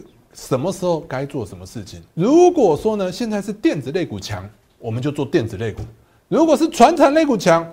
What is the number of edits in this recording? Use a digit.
1